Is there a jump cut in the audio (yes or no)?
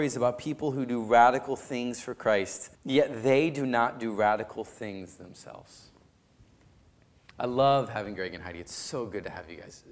yes